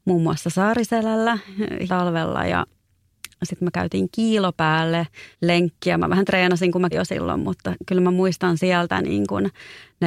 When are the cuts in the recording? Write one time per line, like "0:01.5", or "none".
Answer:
0:01.9
0:05.3
0:06.9